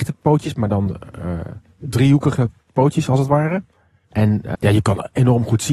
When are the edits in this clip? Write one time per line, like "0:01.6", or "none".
0:04.5